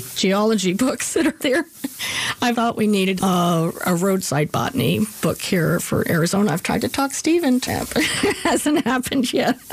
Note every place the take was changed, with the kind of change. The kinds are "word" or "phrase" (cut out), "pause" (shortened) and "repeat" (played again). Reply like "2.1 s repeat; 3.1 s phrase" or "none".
1.4 s word; 2.5 s word; 3.2 s word; 7.7 s word